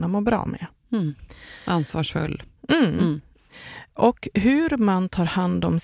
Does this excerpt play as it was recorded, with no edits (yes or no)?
yes